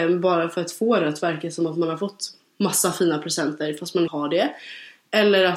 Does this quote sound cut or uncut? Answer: cut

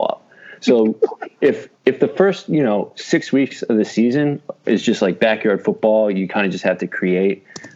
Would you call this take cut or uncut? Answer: cut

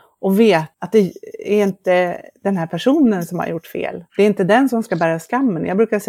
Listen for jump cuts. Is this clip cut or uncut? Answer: cut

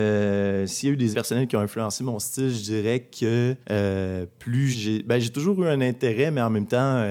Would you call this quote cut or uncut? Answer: cut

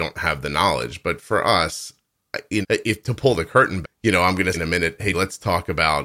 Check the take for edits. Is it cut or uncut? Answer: cut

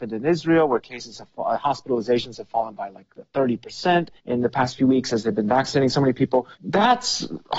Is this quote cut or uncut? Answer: cut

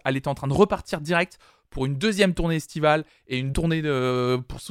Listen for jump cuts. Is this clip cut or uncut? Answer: cut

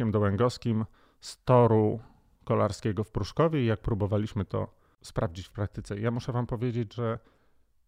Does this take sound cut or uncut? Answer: uncut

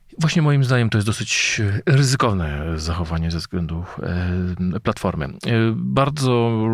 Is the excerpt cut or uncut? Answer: uncut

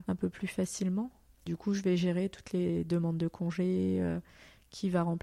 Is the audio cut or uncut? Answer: uncut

